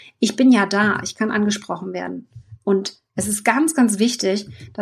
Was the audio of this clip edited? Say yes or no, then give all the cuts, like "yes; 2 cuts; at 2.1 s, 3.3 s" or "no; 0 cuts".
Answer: no; 0 cuts